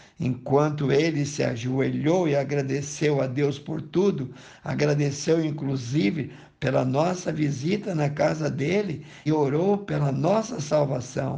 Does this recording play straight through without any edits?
no; 1 cut; at 9.3 s

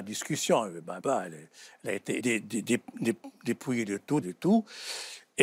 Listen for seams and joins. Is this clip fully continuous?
no; 3 cuts; at 1.0 s, 2.2 s, 4.2 s

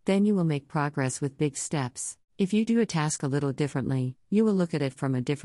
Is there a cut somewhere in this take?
yes; 1 cut; at 2.2 s

